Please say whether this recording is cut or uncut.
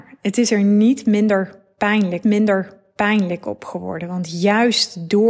cut